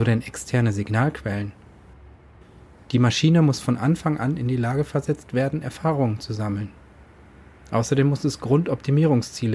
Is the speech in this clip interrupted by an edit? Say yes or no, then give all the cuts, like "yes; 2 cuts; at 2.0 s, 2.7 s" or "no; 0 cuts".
no; 0 cuts